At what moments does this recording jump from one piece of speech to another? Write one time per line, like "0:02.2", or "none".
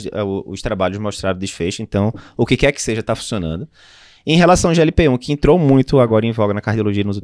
none